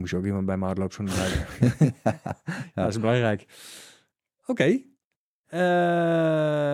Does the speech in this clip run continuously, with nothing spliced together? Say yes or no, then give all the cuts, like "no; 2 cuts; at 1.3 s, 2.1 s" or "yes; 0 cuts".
yes; 0 cuts